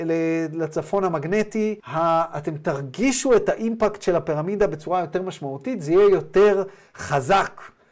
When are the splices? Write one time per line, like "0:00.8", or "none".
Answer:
0:01.8